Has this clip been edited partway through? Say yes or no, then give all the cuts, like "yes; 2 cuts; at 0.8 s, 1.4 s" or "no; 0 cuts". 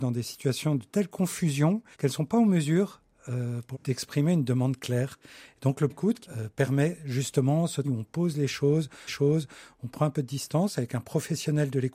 yes; 6 cuts; at 1.9 s, 3.7 s, 5.9 s, 6.2 s, 7.8 s, 9.1 s